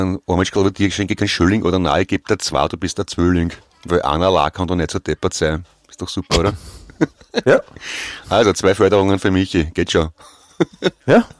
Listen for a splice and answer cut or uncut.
uncut